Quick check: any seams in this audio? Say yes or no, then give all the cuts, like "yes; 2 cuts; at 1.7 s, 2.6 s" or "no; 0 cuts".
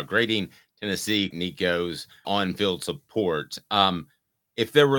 yes; 2 cuts; at 1.3 s, 2.2 s